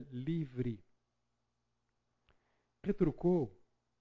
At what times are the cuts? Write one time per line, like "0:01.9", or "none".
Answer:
0:02.8

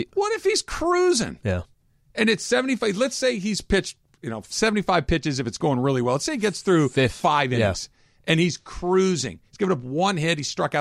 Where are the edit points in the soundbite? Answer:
none

